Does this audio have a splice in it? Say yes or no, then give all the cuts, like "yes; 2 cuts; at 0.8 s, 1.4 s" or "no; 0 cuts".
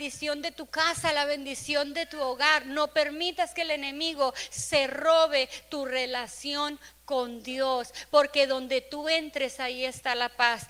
no; 0 cuts